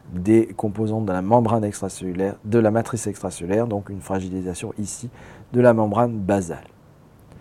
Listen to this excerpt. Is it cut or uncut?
uncut